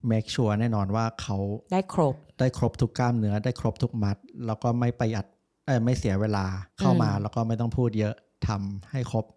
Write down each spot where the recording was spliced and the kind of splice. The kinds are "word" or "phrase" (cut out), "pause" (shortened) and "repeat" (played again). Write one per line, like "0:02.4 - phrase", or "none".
0:06.7 - pause